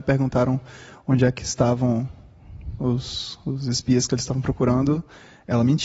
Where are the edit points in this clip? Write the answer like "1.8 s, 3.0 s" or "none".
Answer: none